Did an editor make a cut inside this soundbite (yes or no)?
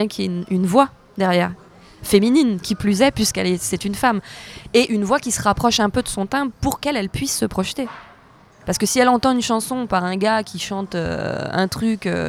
no